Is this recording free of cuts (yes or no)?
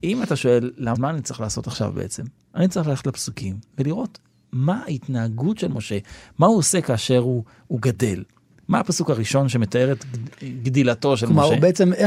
no